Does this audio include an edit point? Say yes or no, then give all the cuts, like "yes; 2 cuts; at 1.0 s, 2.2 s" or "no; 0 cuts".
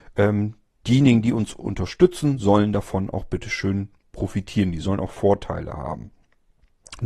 no; 0 cuts